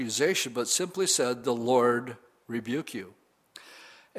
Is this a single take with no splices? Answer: yes; 0 cuts

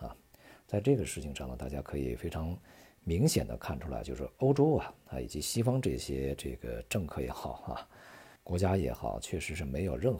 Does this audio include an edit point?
yes; 1 cut; at 8.4 s

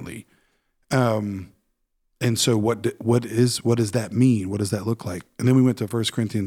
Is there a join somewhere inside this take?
no; 0 cuts

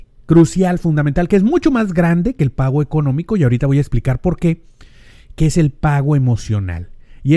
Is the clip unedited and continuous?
yes; 0 cuts

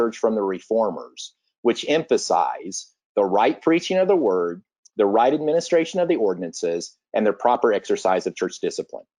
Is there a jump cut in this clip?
no; 0 cuts

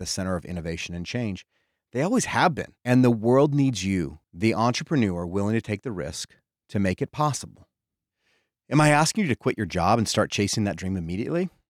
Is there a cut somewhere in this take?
yes; 2 cuts; at 2.8 s, 4.2 s

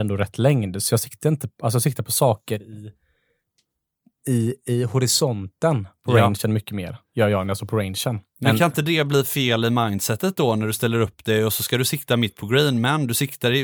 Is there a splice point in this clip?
no; 0 cuts

